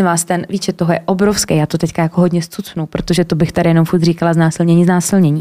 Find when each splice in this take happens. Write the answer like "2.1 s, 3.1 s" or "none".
none

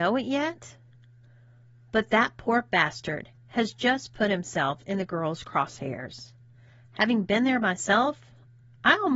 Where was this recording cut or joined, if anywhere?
none

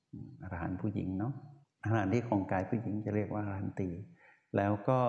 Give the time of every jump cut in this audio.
1.6 s

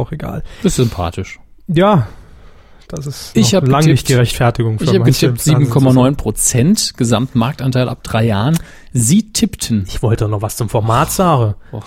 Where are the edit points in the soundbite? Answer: none

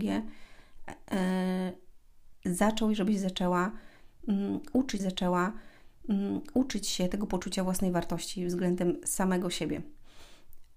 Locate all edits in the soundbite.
2.3 s, 5.0 s

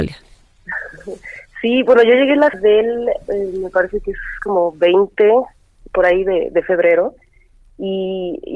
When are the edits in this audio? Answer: 2.5 s

